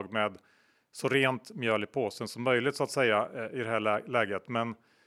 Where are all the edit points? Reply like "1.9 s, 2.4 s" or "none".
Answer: none